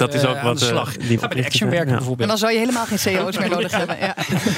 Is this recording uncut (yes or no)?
no